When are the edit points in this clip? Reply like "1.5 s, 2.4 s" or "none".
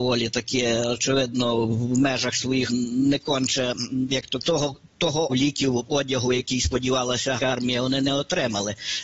2.7 s, 4.4 s, 5.3 s, 7.4 s